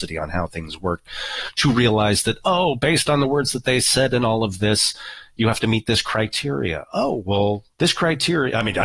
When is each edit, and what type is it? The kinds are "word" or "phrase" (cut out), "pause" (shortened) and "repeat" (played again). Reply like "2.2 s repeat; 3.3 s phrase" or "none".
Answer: 7.7 s pause